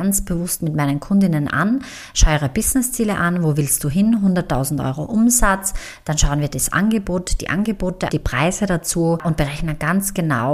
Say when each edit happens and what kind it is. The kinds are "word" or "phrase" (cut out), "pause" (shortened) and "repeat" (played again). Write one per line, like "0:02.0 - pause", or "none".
0:08.1 - word